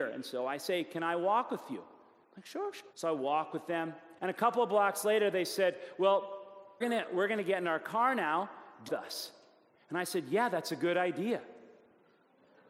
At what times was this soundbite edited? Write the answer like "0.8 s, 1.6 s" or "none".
2.9 s, 4.2 s, 6.8 s, 8.9 s